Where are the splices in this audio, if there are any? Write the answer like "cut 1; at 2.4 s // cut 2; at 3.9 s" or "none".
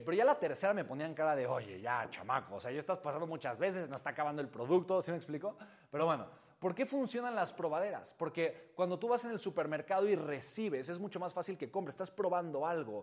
none